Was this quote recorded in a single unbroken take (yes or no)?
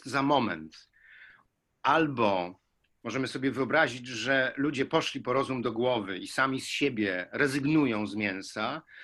yes